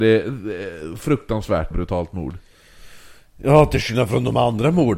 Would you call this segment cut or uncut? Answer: cut